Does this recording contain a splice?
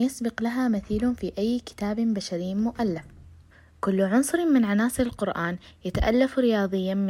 yes; 1 cut; at 3.5 s

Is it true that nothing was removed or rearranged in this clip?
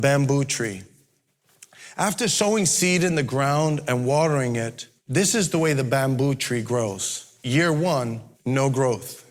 no; 2 cuts; at 5.0 s, 8.3 s

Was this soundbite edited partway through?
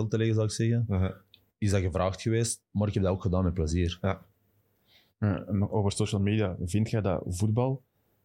no; 0 cuts

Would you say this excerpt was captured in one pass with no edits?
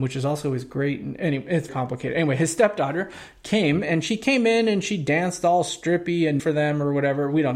no; 2 cuts; at 1.7 s, 6.4 s

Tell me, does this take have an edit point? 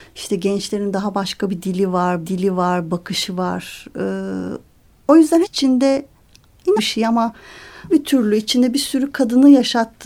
yes; 5 cuts; at 2.2 s, 4.8 s, 5.4 s, 6.8 s, 7.9 s

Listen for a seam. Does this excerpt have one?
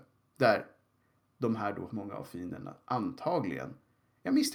yes; 1 cut; at 1.9 s

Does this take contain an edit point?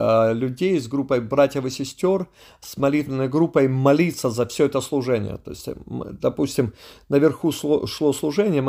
no; 0 cuts

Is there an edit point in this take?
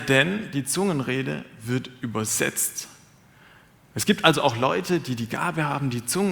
no; 0 cuts

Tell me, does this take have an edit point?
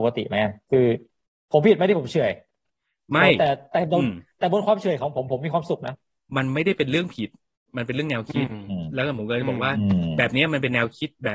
no; 0 cuts

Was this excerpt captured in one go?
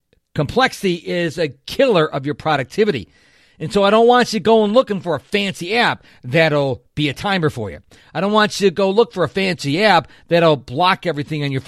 yes; 0 cuts

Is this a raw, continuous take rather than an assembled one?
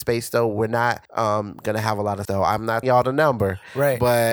no; 3 cuts; at 1.1 s, 2.2 s, 2.8 s

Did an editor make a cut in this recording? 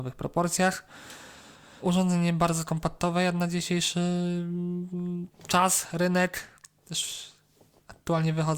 yes; 1 cut; at 5.3 s

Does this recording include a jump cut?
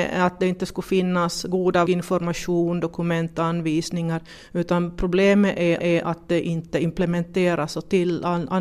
yes; 2 cuts; at 1.9 s, 5.8 s

